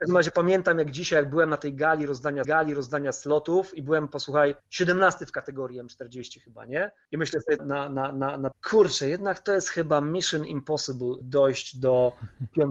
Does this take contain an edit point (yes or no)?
yes